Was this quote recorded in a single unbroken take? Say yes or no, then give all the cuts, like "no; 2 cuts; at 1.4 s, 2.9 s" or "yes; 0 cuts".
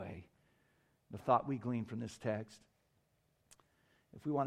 no; 1 cut; at 1.2 s